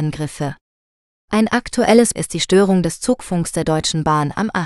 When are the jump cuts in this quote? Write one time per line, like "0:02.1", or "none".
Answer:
0:02.2

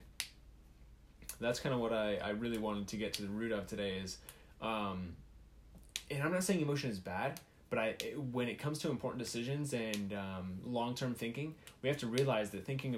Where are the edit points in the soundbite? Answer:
none

